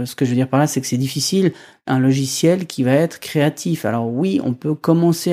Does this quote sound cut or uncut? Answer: cut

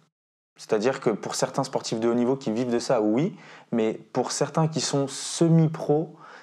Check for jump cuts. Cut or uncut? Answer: uncut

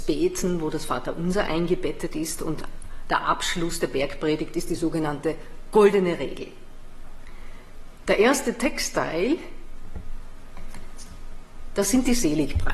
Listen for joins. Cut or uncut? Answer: uncut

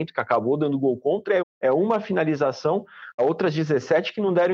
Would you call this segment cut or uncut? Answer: cut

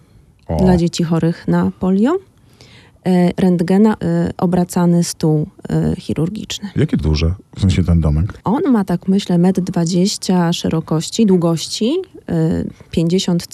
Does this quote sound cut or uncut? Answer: cut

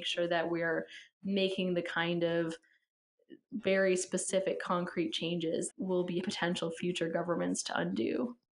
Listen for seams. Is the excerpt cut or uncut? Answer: cut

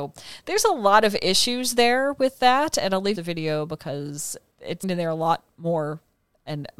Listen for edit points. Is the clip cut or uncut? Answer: cut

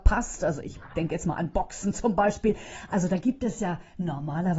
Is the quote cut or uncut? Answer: uncut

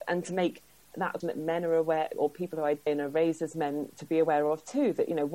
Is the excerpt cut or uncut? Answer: cut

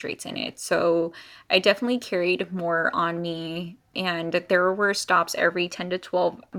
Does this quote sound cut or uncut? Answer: uncut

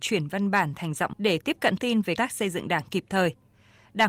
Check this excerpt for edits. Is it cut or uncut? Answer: cut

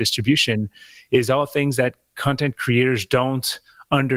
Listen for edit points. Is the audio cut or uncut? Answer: uncut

